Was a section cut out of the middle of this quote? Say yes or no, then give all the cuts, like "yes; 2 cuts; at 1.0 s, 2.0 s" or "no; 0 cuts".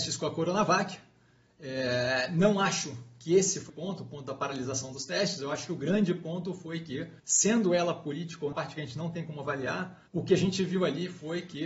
yes; 4 cuts; at 3.7 s, 7.2 s, 8.5 s, 10.1 s